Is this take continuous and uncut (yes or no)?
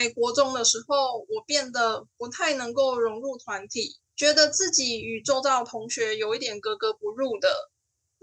no